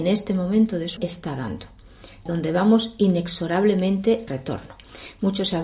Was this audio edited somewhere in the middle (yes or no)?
yes